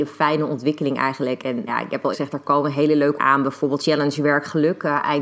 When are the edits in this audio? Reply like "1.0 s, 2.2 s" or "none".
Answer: 1.7 s, 2.1 s, 3.2 s, 3.8 s